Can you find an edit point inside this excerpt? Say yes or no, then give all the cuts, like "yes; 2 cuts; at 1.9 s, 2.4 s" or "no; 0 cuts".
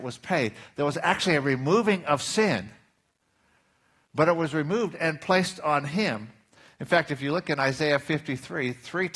no; 0 cuts